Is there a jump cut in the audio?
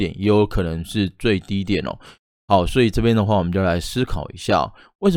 no; 0 cuts

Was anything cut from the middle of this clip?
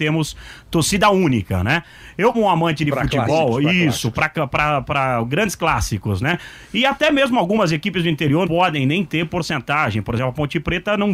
yes; 2 cuts; at 2.3 s, 8.4 s

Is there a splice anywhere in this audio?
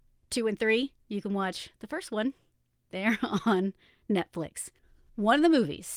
no; 0 cuts

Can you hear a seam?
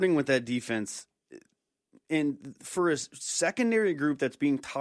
no; 0 cuts

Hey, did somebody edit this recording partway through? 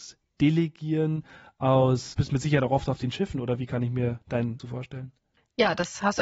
yes; 2 cuts; at 2.1 s, 4.6 s

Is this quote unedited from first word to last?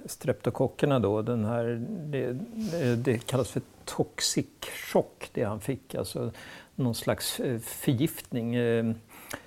yes; 0 cuts

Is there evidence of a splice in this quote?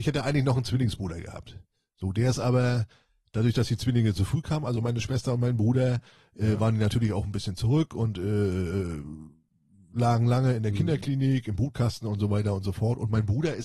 no; 0 cuts

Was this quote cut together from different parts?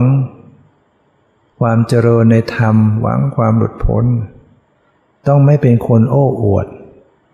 no; 0 cuts

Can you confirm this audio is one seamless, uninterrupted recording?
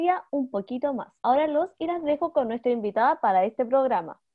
no; 1 cut; at 1.2 s

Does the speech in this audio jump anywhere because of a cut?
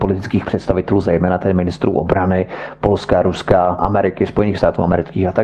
no; 0 cuts

